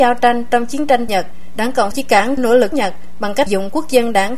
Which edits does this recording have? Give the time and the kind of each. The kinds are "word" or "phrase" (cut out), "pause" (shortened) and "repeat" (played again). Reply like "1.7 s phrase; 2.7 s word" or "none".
1.1 s word; 1.9 s word; 2.4 s word; 2.7 s word; 3.5 s word